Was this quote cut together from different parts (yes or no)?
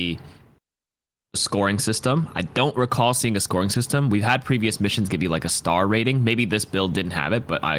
no